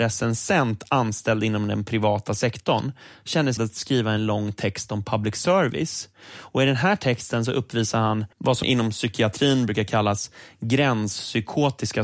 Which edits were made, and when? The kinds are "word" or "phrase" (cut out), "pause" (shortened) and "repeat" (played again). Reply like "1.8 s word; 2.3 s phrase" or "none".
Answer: 3.6 s word; 8.3 s pause; 8.6 s word